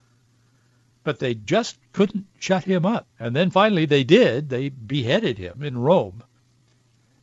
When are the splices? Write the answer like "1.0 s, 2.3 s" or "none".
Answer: 3.1 s